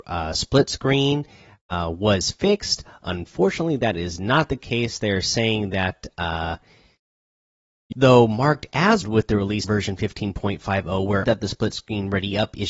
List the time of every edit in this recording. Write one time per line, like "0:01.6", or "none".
0:07.9
0:09.0
0:09.6
0:11.2